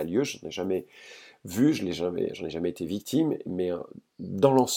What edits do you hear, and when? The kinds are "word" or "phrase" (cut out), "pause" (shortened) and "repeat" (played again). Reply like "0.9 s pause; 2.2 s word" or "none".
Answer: none